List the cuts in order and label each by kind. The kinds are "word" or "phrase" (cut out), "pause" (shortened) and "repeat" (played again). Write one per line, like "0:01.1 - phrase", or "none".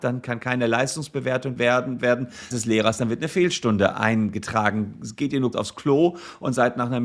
0:01.6 - word
0:02.0 - word
0:02.5 - word
0:05.5 - word